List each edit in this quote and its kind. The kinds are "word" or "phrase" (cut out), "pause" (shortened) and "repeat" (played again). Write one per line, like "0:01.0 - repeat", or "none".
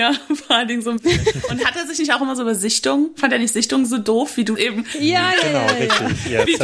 0:04.6 - word